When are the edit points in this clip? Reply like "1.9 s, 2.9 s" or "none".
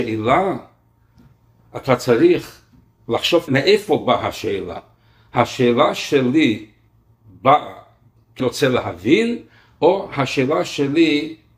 3.5 s, 8.4 s